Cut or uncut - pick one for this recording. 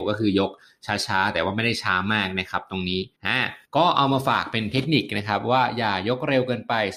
cut